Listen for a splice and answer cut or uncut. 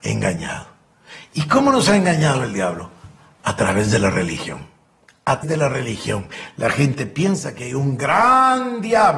cut